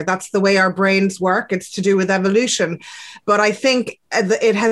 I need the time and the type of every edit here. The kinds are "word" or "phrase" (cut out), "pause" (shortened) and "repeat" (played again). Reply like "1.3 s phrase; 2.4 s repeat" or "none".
none